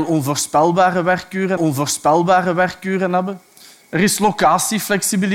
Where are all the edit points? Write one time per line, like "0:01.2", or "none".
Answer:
0:01.6